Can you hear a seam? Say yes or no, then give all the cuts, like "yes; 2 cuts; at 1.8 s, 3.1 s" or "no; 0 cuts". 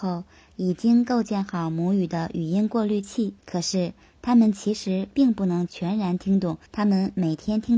yes; 2 cuts; at 3.4 s, 6.7 s